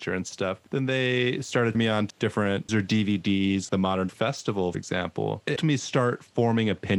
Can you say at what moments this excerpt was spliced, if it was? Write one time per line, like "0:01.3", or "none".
0:01.7
0:02.1
0:02.7
0:03.7
0:04.1
0:04.7
0:05.6